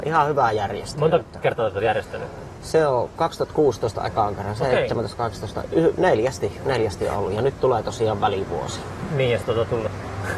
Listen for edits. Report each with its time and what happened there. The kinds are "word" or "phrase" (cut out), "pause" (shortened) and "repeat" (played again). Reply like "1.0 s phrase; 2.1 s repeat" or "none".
none

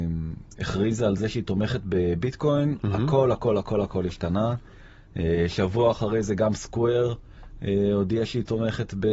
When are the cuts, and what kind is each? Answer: none

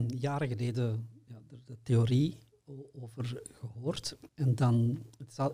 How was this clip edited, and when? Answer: 4.3 s pause

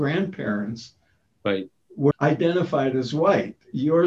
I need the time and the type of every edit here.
2.1 s word

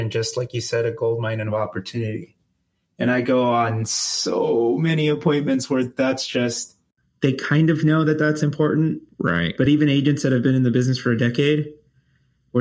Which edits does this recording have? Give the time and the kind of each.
none

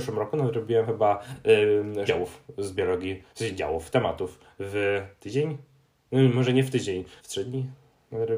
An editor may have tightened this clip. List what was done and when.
2.1 s word; 3.3 s pause; 7.2 s pause

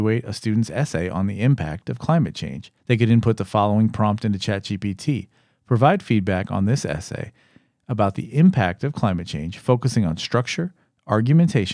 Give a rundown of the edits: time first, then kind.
2.8 s pause

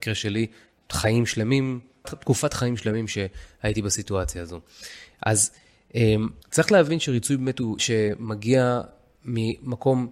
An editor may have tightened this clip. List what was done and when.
2.0 s word; 6.4 s pause; 7.8 s word

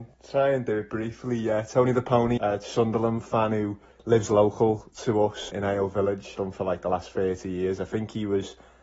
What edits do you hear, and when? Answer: 2.4 s word; 3.9 s pause; 5.5 s word; 6.3 s word

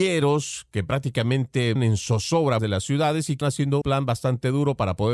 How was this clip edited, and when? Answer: 1.8 s word; 2.6 s word; 3.4 s word; 3.8 s word

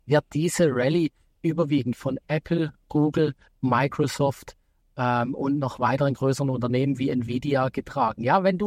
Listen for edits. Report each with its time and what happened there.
none

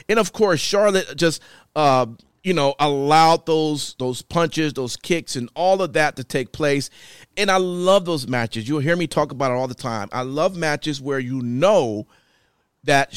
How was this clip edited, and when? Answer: none

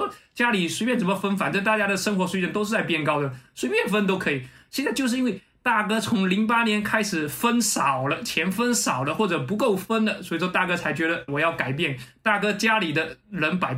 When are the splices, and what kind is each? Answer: 11.3 s phrase

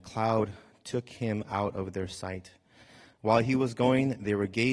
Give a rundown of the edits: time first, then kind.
none

